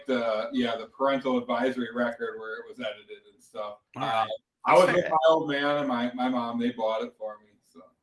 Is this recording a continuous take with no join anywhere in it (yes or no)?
no